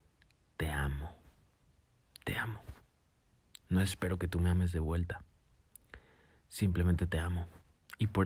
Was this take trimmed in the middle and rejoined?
no; 0 cuts

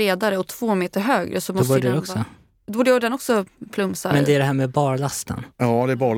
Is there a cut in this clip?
no; 0 cuts

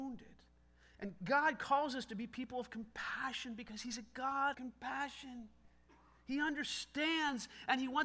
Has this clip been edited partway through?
yes; 1 cut; at 4.5 s

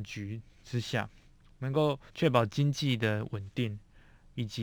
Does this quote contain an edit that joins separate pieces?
yes; 1 cut; at 2.1 s

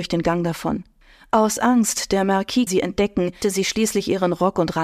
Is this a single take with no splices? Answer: no; 2 cuts; at 2.7 s, 3.4 s

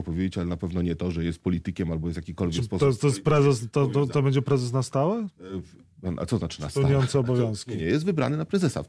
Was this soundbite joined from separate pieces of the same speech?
no; 0 cuts

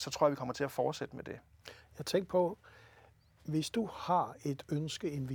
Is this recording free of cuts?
yes; 0 cuts

